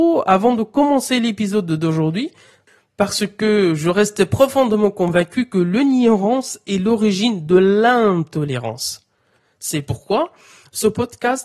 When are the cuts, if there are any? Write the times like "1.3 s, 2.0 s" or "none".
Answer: none